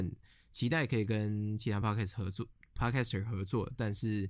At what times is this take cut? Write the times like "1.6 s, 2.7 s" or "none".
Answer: none